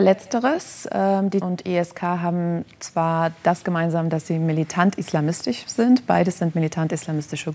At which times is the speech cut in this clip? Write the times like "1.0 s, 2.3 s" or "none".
1.4 s